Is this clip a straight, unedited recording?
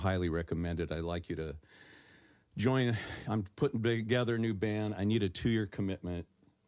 yes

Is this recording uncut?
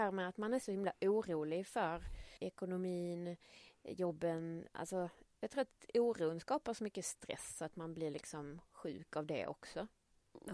no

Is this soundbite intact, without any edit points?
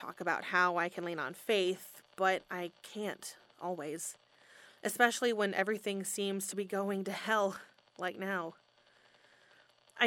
yes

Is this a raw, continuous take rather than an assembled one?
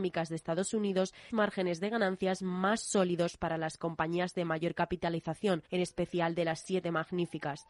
no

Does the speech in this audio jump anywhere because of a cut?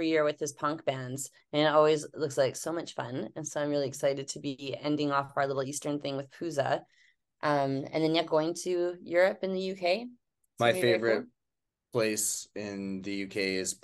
no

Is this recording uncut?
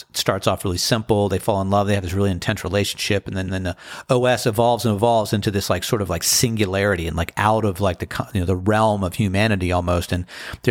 no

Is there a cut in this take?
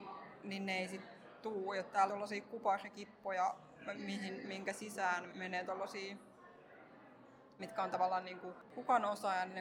yes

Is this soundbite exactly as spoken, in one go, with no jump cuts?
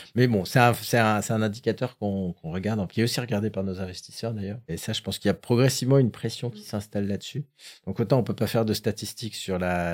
no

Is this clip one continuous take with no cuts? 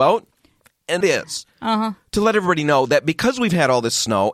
no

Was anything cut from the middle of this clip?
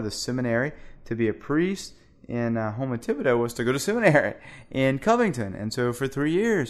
no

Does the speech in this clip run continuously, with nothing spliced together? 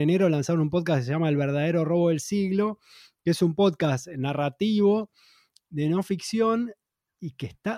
yes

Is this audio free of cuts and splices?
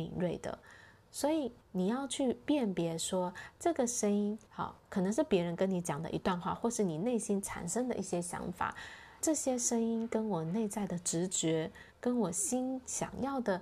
no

